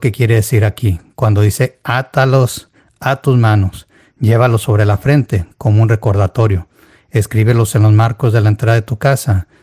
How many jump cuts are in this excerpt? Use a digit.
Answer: 0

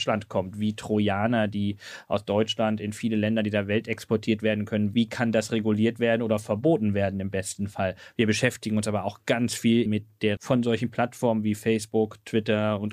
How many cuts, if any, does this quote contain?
2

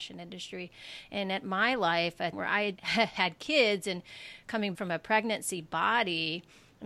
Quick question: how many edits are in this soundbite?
3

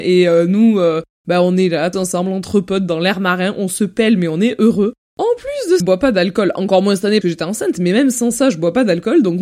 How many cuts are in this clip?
3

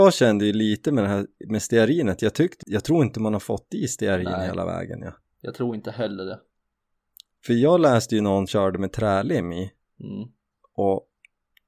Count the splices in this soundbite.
2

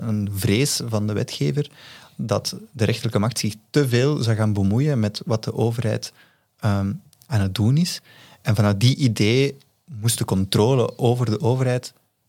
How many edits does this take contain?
0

